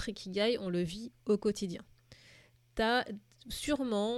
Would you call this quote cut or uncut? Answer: uncut